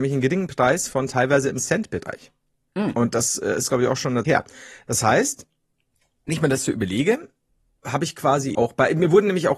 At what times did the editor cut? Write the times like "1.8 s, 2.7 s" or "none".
4.2 s, 6.3 s, 8.5 s